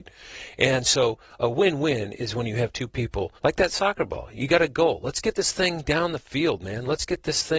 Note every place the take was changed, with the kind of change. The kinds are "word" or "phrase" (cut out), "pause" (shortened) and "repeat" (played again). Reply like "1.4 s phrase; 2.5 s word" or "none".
3.4 s pause